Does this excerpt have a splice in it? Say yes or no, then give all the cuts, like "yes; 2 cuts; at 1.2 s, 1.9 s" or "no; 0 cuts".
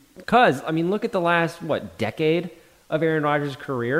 no; 0 cuts